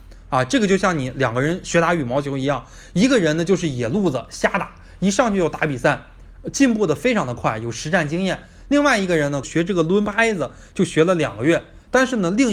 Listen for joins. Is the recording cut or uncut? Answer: cut